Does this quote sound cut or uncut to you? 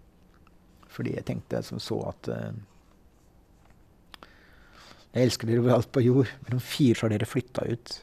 cut